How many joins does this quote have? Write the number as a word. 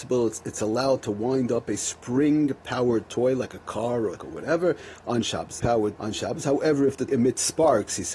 four